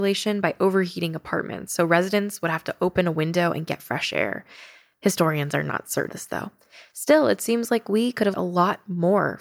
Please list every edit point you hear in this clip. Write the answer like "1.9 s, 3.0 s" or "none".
6.1 s, 8.3 s